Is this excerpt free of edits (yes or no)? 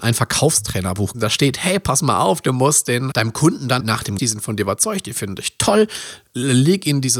no